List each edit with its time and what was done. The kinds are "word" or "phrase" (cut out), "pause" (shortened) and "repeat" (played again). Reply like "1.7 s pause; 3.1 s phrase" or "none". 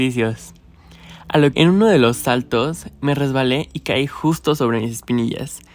1.5 s word